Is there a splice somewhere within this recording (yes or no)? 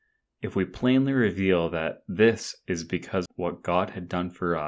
yes